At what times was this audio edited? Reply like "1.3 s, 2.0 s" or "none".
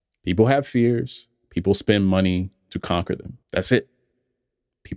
3.4 s

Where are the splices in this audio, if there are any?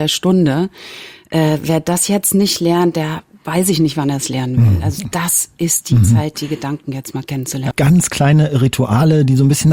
7.7 s

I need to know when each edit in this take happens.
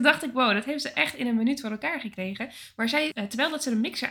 3.1 s

